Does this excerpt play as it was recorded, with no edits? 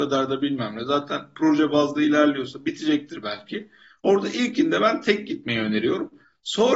yes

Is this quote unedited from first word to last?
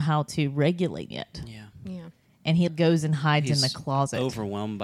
no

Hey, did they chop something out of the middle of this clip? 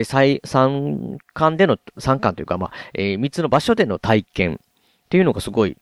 yes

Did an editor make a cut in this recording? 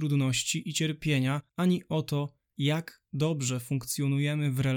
yes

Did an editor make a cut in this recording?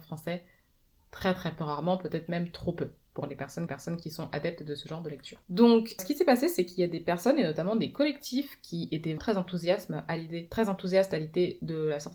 yes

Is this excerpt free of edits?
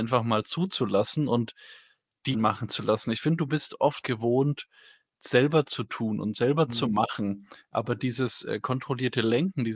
no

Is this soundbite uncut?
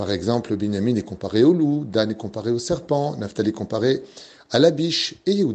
yes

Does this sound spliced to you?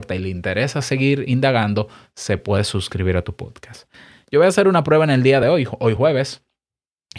no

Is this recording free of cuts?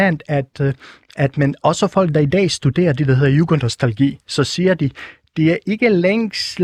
yes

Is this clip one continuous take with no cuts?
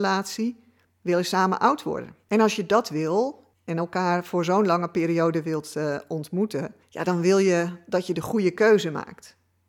no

